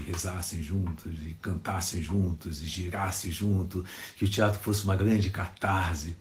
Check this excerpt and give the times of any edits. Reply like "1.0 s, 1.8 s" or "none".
none